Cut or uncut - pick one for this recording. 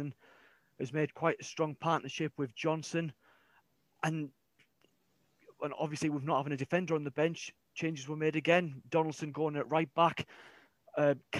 uncut